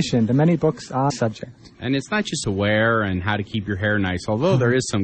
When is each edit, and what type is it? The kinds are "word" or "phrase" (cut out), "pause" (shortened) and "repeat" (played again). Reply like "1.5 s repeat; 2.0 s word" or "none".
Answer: 1.1 s word; 1.7 s pause; 2.4 s phrase

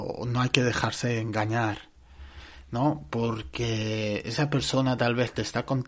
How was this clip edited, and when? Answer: none

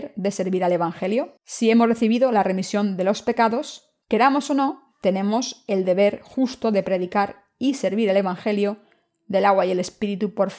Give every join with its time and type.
1.4 s pause; 4.0 s pause

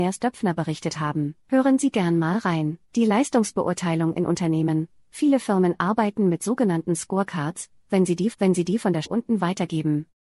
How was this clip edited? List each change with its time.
1.4 s pause; 2.9 s pause; 8.3 s repeat; 9.0 s phrase

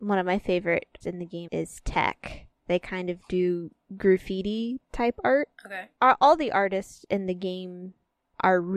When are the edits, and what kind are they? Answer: 1.0 s word; 1.5 s word; 2.6 s pause; 5.6 s pause

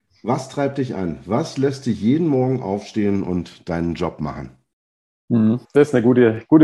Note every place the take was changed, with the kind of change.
5.6 s pause

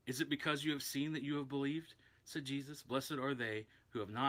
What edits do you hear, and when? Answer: none

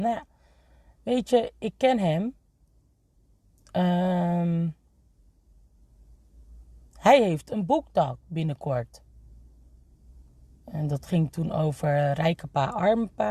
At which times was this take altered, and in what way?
none

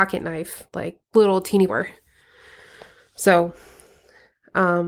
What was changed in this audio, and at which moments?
1.0 s pause; 1.7 s phrase

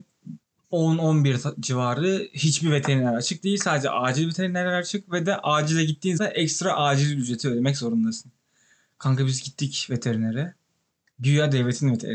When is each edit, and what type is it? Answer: 6.2 s word

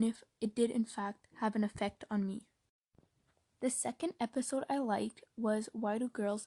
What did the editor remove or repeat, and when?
none

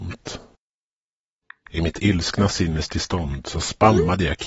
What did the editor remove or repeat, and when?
none

